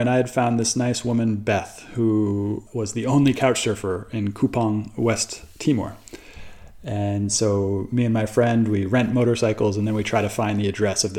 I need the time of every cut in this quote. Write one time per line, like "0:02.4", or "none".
0:02.7